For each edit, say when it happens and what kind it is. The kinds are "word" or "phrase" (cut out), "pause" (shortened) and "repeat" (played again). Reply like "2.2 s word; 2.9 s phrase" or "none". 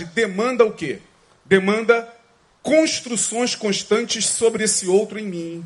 none